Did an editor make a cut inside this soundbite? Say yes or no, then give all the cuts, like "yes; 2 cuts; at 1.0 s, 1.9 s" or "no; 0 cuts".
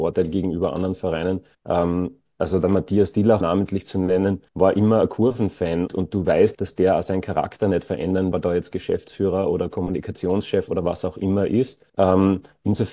yes; 7 cuts; at 1.5 s, 3.4 s, 4.5 s, 5.9 s, 6.5 s, 8.3 s, 11.9 s